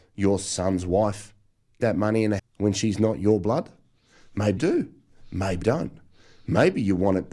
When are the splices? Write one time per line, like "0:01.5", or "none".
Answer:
0:01.8
0:02.4
0:04.6
0:05.6